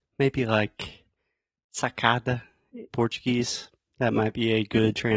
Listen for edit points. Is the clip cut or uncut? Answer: cut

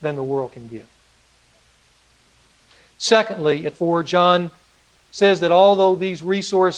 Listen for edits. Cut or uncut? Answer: cut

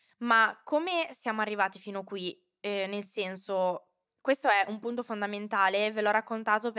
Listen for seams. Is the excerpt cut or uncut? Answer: uncut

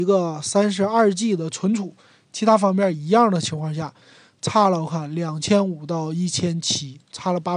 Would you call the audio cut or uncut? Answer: uncut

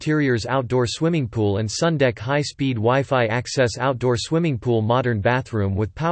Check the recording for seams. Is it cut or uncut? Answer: uncut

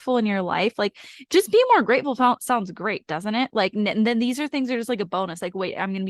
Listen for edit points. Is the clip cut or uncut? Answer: uncut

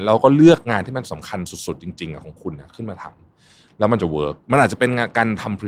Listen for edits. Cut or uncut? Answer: uncut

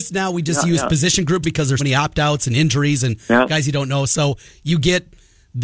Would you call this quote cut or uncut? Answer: cut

